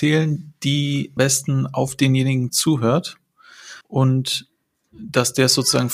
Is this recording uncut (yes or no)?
no